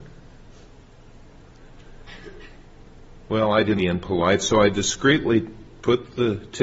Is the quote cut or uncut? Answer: cut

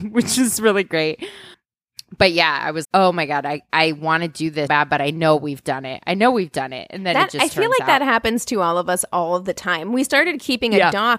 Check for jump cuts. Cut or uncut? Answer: cut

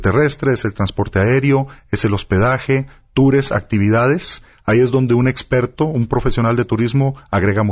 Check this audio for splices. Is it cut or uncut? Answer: uncut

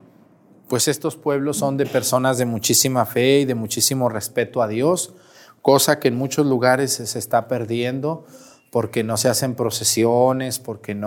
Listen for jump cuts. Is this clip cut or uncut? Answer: uncut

